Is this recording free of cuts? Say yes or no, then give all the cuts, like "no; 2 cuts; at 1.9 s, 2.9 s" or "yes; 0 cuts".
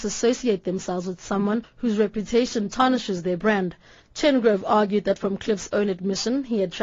yes; 0 cuts